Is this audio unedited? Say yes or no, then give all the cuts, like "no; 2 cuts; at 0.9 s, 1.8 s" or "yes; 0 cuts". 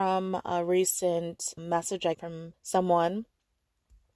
no; 3 cuts; at 1.6 s, 2.1 s, 2.5 s